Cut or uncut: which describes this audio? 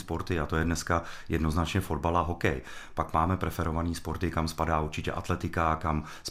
uncut